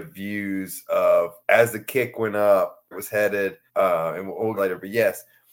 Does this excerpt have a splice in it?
yes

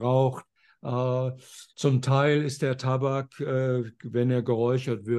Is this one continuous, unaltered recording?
no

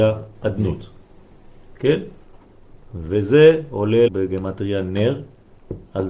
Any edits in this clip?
yes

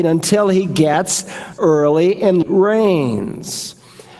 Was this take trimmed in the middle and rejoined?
yes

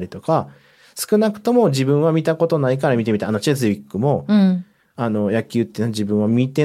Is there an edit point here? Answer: no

